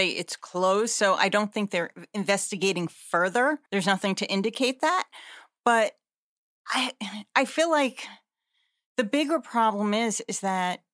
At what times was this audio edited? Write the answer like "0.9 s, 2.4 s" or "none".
3.7 s